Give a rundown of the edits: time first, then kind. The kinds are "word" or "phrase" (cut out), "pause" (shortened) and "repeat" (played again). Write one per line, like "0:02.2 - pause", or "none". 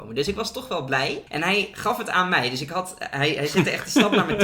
0:01.3 - pause